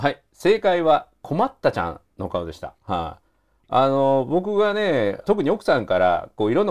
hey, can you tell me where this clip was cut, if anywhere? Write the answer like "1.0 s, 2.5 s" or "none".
2.8 s